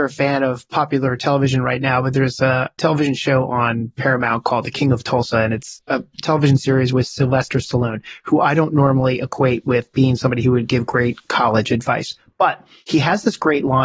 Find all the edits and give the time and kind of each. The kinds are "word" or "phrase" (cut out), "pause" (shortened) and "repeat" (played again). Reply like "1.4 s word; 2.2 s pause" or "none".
none